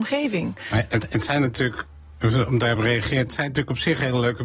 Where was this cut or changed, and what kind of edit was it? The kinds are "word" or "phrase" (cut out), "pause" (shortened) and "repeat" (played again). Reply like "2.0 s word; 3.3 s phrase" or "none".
none